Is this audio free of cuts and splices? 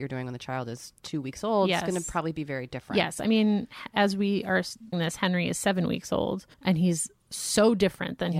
no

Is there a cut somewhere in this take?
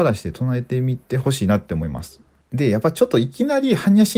no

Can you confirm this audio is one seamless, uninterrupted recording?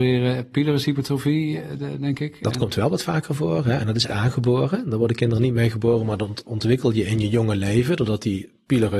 no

